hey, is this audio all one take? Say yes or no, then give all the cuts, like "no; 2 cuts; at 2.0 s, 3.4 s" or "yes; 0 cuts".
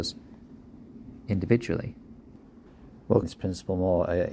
no; 2 cuts; at 1.3 s, 3.2 s